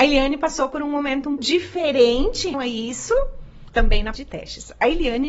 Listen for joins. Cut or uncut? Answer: cut